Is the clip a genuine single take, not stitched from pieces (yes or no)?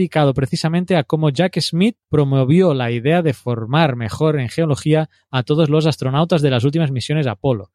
no